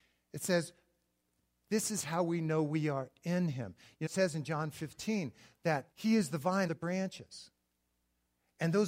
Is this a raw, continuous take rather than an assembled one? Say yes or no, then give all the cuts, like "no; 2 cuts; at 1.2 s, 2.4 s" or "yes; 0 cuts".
no; 3 cuts; at 4.1 s, 5.9 s, 6.7 s